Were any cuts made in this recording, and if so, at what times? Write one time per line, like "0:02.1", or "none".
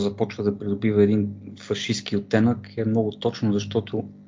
none